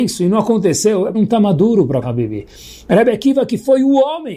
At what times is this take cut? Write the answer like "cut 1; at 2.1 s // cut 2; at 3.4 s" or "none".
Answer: cut 1; at 1.1 s // cut 2; at 2.0 s